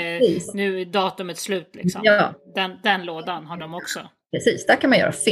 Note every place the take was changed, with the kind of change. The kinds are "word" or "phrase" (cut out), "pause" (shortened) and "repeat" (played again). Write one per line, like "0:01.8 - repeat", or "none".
none